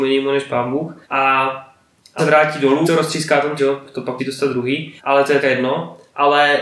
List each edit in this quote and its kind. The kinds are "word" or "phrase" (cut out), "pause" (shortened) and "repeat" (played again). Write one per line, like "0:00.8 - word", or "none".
0:01.0 - pause
0:02.2 - word
0:02.8 - word
0:03.6 - phrase
0:04.2 - word
0:05.0 - pause
0:05.4 - word